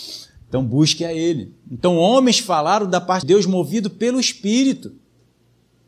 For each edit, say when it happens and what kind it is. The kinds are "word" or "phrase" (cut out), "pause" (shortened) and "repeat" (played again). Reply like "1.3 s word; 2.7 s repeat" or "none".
3.2 s word